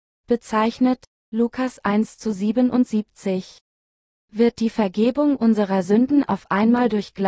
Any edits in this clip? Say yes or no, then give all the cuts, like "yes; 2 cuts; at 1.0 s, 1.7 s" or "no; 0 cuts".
no; 0 cuts